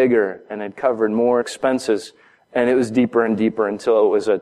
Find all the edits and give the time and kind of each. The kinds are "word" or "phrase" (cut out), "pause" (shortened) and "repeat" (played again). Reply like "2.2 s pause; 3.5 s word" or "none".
1.4 s phrase